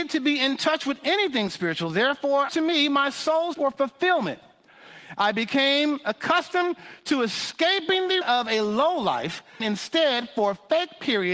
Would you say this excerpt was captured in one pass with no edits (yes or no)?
no